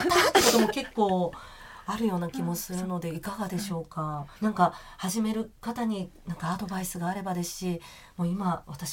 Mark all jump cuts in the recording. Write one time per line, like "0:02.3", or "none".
0:04.4

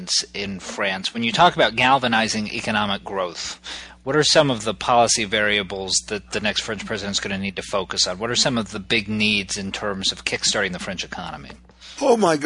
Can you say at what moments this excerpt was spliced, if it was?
none

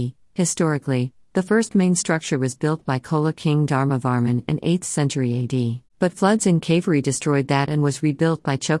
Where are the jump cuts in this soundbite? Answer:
0:05.9

